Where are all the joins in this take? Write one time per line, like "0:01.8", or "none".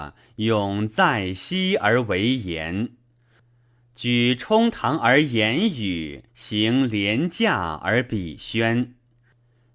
0:06.3